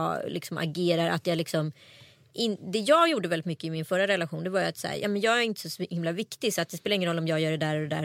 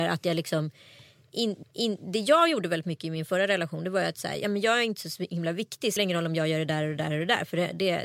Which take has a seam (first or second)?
second